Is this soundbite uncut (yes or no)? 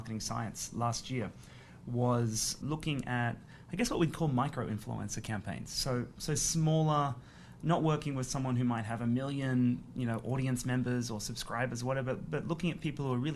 no